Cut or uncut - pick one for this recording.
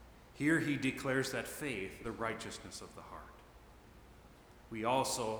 cut